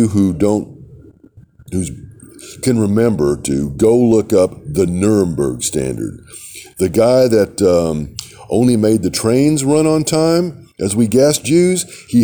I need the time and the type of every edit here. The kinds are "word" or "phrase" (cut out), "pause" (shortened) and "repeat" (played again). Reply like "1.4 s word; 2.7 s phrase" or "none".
none